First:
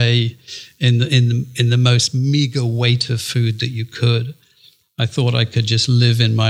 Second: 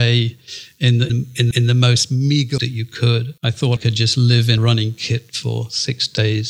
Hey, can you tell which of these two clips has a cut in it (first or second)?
second